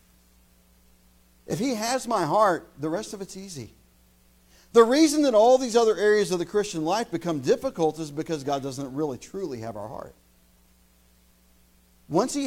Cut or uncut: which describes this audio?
uncut